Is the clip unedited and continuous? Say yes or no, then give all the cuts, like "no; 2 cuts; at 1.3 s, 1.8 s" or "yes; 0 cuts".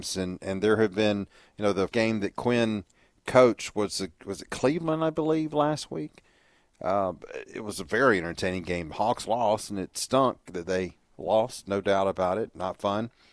no; 1 cut; at 1.9 s